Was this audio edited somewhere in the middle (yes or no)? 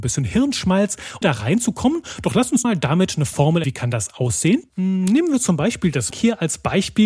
yes